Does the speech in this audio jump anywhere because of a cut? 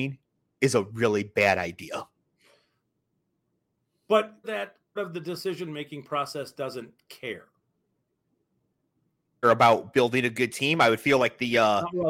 yes; 3 cuts; at 4.4 s, 5.0 s, 9.4 s

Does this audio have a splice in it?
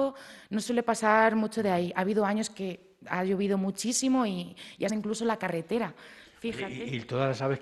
yes; 1 cut; at 4.9 s

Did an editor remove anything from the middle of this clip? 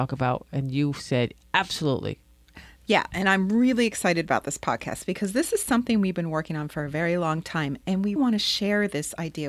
yes; 1 cut; at 8.2 s

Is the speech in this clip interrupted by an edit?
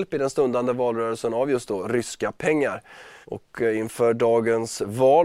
yes; 1 cut; at 3.2 s

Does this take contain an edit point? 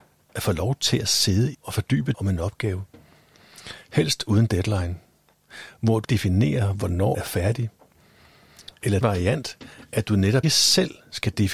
yes; 6 cuts; at 1.5 s, 2.1 s, 6.0 s, 7.1 s, 9.0 s, 10.4 s

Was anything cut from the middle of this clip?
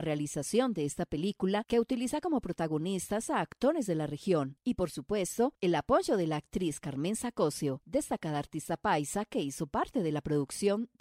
no; 0 cuts

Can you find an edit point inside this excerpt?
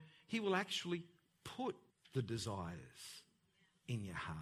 yes; 1 cut; at 1.9 s

